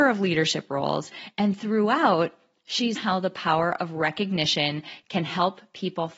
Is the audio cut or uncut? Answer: cut